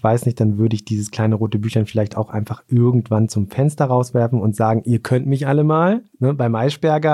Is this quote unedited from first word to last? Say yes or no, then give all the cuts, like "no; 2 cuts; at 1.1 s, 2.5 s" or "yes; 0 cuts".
no; 1 cut; at 6.1 s